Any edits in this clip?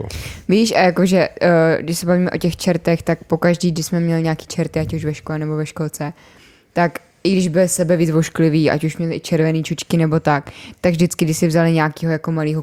no; 0 cuts

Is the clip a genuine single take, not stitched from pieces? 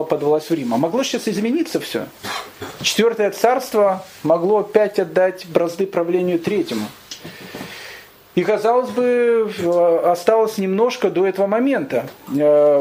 yes; 0 cuts

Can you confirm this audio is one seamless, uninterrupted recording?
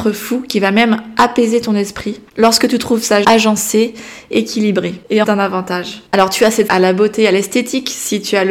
no; 6 cuts; at 2.3 s, 3.2 s, 4.3 s, 5.2 s, 6.1 s, 6.7 s

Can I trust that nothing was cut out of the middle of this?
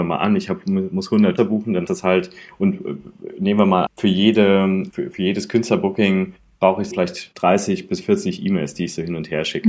no; 5 cuts; at 1.4 s, 1.9 s, 3.9 s, 4.9 s, 6.9 s

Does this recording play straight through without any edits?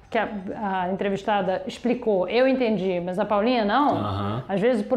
yes; 0 cuts

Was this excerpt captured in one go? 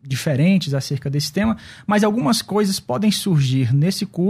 yes; 0 cuts

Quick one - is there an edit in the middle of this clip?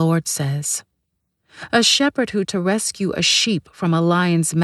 yes; 1 cut; at 2.4 s

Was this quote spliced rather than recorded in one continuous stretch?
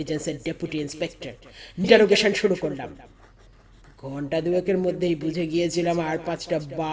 yes; 1 cut; at 1.8 s

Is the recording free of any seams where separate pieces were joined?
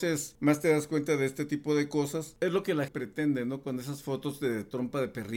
no; 1 cut; at 2.9 s

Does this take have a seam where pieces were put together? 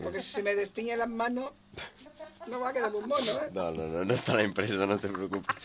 no; 0 cuts

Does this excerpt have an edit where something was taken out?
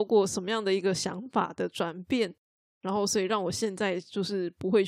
no; 0 cuts

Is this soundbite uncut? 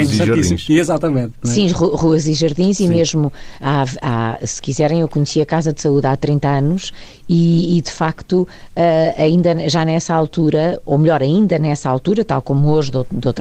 yes; 0 cuts

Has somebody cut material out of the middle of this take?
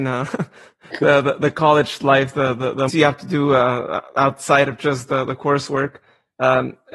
yes; 1 cut; at 2.9 s

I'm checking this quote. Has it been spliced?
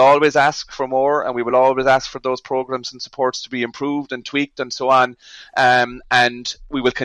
no; 0 cuts

